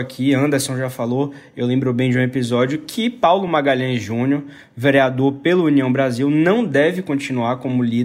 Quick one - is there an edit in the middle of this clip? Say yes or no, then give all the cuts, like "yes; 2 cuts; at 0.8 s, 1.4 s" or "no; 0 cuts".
no; 0 cuts